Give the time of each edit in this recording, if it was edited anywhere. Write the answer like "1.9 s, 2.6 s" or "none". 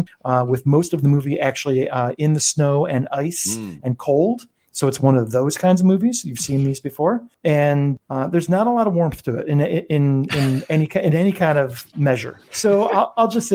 none